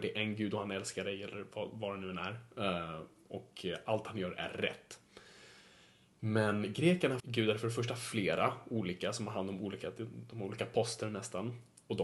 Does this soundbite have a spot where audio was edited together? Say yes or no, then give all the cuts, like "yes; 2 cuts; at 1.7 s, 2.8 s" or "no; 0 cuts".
yes; 1 cut; at 7.2 s